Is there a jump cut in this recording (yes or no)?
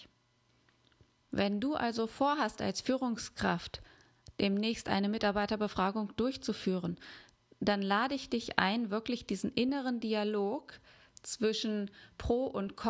no